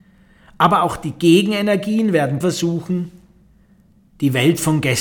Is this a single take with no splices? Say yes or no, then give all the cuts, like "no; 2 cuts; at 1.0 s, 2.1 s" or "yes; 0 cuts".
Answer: no; 1 cut; at 2.4 s